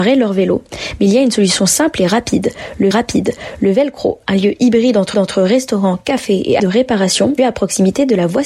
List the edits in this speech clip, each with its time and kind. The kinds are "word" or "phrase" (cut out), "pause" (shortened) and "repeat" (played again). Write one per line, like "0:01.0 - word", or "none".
0:02.9 - repeat
0:05.1 - repeat
0:06.6 - word
0:07.4 - word